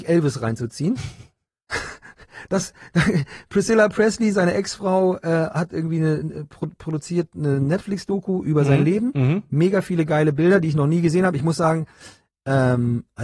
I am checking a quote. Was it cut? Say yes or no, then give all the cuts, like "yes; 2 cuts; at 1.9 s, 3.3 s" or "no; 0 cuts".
no; 0 cuts